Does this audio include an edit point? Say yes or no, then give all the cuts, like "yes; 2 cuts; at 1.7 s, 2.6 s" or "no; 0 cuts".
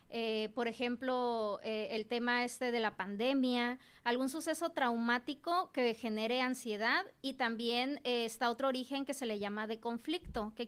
no; 0 cuts